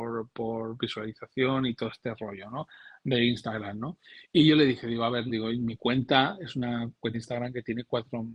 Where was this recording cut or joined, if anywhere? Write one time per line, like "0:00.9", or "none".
0:04.2
0:05.3
0:07.1